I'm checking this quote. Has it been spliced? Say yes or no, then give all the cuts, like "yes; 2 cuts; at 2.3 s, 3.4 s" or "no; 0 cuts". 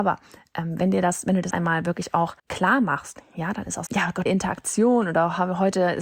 yes; 4 cuts; at 1.5 s, 2.4 s, 3.9 s, 4.3 s